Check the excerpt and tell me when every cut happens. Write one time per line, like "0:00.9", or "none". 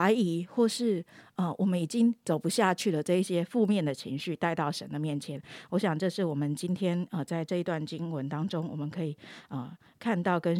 none